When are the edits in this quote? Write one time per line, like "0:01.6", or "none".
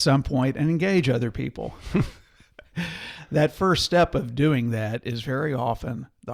none